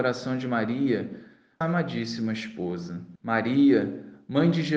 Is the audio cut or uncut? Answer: cut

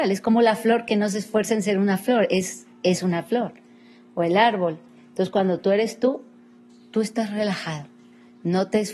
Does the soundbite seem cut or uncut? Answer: uncut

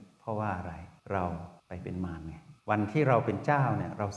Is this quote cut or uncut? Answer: cut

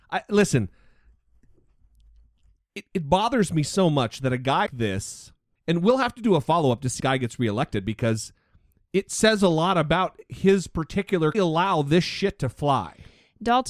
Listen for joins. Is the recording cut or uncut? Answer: cut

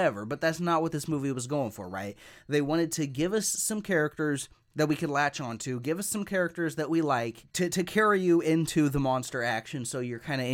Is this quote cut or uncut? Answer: uncut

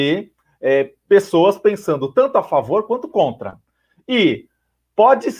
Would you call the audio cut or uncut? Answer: uncut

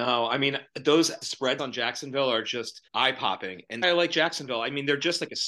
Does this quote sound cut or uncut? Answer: cut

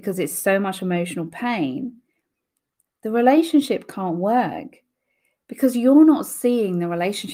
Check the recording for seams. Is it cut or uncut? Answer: uncut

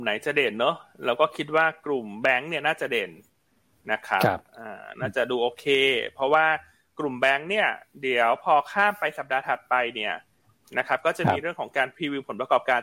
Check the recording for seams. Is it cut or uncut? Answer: uncut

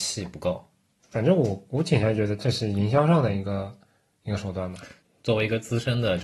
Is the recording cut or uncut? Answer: uncut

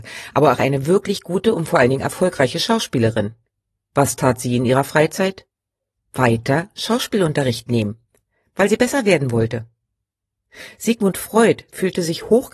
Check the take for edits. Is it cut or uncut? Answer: uncut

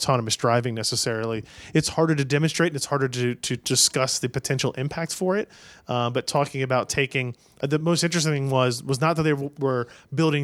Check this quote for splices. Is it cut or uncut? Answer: uncut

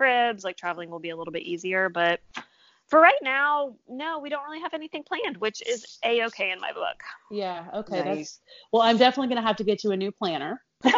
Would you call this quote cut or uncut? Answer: uncut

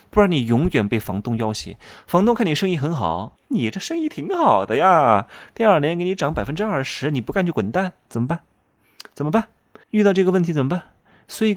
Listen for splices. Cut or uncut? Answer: cut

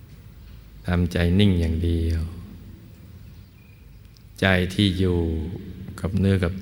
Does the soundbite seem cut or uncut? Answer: uncut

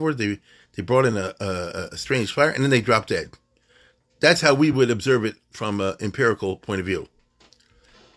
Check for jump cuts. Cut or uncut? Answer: uncut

